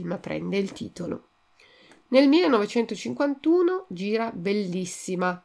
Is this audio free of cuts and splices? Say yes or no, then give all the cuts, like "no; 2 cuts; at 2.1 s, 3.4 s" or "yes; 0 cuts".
yes; 0 cuts